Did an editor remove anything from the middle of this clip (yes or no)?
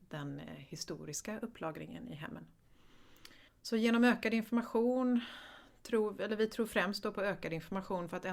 yes